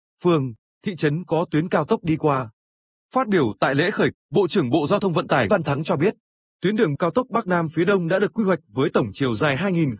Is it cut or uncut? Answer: cut